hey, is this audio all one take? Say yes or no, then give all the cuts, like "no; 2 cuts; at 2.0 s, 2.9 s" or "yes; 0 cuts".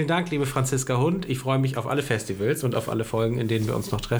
yes; 0 cuts